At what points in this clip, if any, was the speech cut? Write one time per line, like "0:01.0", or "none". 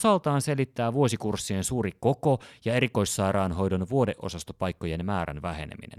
none